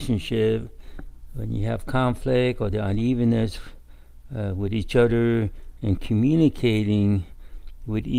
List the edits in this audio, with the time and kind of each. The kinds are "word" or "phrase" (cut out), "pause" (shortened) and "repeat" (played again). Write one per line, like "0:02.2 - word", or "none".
none

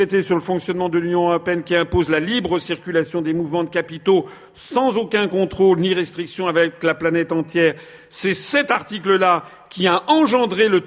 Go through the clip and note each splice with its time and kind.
none

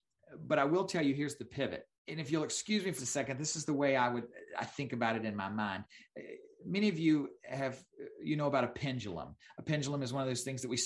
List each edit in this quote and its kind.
0:02.0 - pause
0:03.0 - word

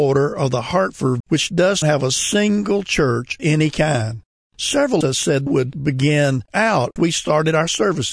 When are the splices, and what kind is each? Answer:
0:01.2 - word
0:01.8 - word
0:03.4 - word
0:05.0 - word
0:05.5 - word
0:06.5 - word
0:07.0 - word

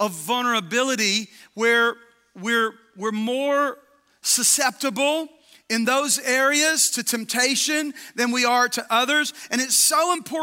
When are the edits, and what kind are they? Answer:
none

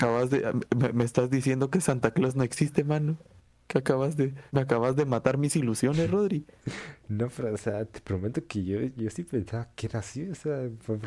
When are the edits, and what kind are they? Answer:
0:04.5 - pause
0:09.7 - word

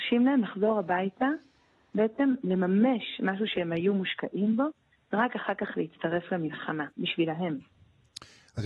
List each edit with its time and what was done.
none

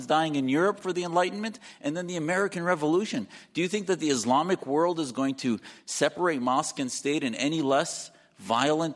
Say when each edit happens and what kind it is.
none

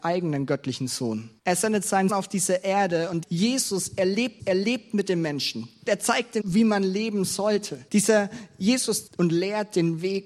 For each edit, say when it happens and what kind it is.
0:01.4 - pause
0:02.1 - word
0:03.2 - word
0:04.4 - repeat
0:05.9 - word
0:06.4 - word
0:07.9 - pause
0:09.1 - word

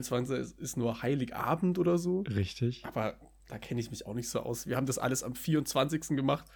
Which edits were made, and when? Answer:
none

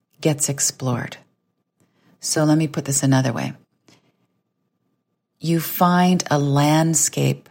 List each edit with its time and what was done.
none

